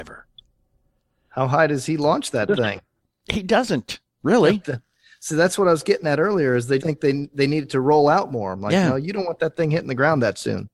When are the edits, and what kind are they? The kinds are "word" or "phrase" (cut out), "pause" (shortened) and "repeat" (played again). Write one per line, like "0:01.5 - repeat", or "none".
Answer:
0:03.0 - pause
0:04.1 - pause
0:06.8 - word